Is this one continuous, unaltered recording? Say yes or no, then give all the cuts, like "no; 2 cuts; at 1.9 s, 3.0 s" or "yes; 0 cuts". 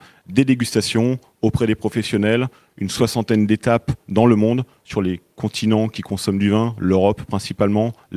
yes; 0 cuts